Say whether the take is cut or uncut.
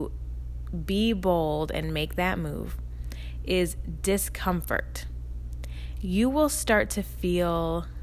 uncut